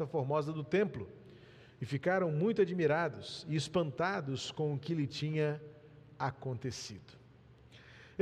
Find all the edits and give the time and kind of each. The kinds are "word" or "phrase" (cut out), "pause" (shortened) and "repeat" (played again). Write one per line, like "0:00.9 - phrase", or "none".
none

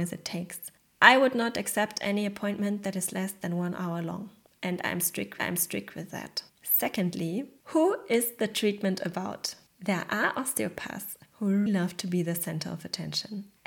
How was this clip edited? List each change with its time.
0:05.4 - repeat
0:06.5 - pause
0:09.7 - pause
0:11.7 - word

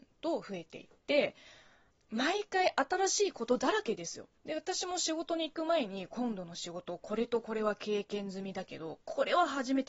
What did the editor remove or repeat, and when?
0:04.4 - pause

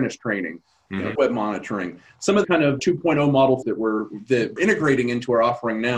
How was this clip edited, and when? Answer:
0:01.2 - word
0:02.4 - word
0:02.8 - word
0:03.6 - word
0:04.6 - word

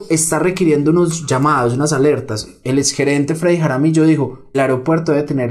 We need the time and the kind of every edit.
0:04.5 - word

